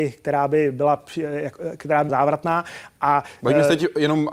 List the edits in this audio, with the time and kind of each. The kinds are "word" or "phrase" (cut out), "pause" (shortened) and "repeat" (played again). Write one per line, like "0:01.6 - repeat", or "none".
0:02.1 - word

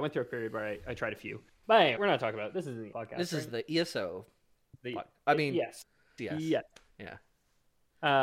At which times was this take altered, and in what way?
0:01.6 - word
0:02.0 - word
0:02.9 - word
0:06.2 - word

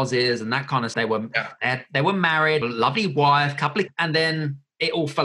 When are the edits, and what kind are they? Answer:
0:00.9 - word
0:02.6 - word
0:03.9 - word

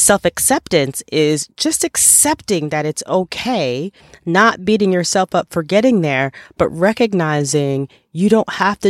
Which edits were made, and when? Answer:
none

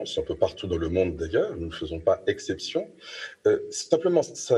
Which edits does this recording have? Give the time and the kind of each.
none

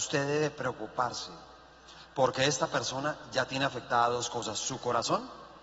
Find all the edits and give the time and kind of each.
none

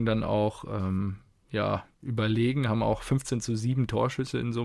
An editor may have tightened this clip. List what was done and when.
0:01.9 - pause

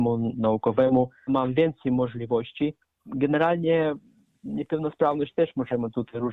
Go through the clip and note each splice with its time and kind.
0:01.3 - word
0:03.0 - word

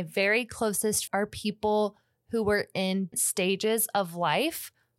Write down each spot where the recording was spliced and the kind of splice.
0:01.1 - word
0:03.1 - word

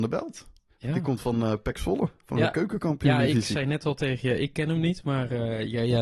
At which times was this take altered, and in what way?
none

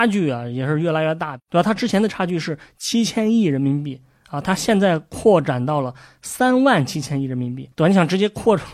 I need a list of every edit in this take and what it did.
0:02.1 - word
0:07.7 - pause

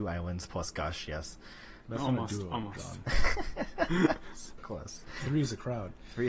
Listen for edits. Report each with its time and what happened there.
0:01.8 - word
0:04.6 - word

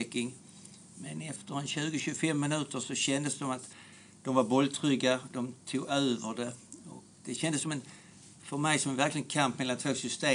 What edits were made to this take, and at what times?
none

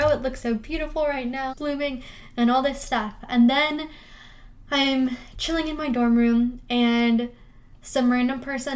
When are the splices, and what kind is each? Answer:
0:01.5 - phrase

